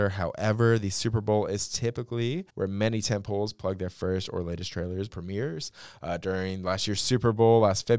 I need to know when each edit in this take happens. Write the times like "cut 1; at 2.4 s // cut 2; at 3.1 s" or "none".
cut 1; at 2.5 s // cut 2; at 5.1 s